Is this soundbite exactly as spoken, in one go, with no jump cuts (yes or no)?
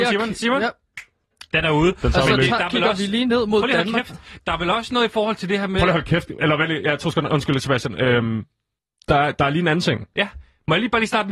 no